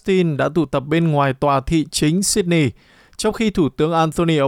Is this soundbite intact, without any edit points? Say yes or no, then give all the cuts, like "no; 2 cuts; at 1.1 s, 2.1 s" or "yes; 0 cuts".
yes; 0 cuts